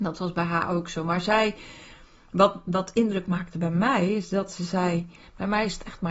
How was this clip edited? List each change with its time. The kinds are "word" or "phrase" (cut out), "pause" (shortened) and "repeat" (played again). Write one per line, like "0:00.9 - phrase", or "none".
none